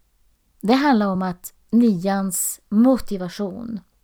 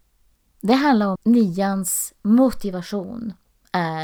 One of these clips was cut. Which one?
second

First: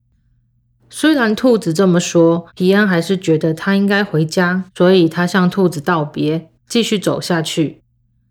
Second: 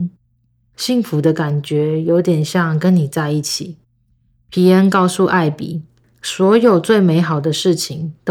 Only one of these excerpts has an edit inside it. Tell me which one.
first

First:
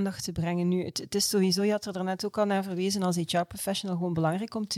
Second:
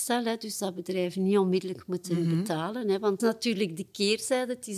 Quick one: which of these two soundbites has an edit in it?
second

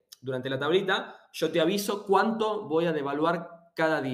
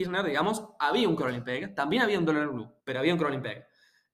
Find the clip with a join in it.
second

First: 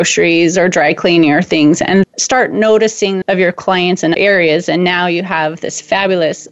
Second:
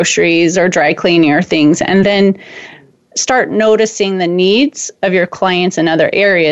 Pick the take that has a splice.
first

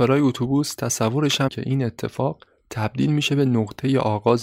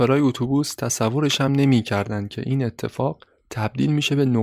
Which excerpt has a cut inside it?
first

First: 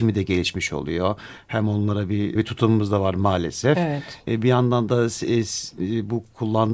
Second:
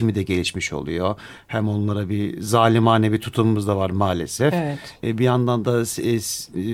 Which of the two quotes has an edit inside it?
first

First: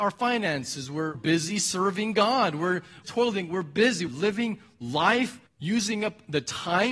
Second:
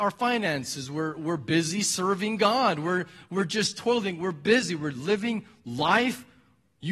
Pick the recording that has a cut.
first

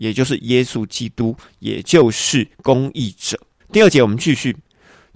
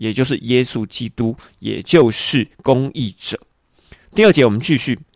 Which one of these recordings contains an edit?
first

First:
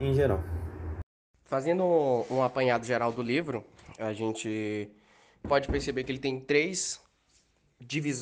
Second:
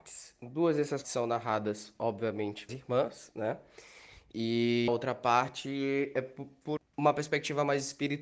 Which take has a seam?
second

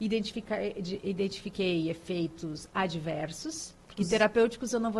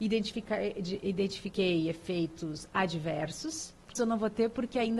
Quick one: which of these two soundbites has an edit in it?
second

